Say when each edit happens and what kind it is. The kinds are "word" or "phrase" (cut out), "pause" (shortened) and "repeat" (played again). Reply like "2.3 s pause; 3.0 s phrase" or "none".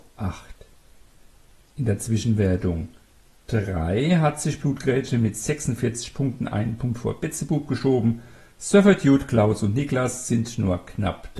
none